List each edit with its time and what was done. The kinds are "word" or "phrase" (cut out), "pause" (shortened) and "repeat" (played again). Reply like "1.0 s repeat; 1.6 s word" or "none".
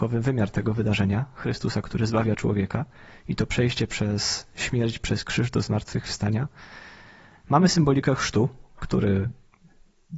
none